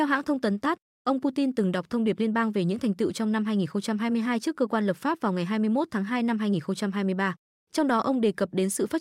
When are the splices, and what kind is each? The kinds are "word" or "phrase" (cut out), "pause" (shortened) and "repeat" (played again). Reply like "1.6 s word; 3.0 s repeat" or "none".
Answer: none